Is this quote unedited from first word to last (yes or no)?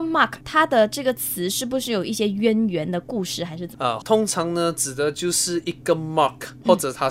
no